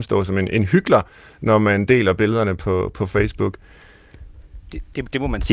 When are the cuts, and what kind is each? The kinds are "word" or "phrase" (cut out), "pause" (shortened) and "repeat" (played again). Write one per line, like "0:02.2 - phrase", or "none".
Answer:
none